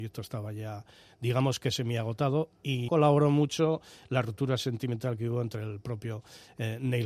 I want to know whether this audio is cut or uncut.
cut